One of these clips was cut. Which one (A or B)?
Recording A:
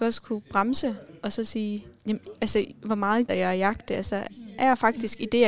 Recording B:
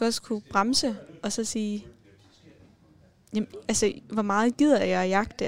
A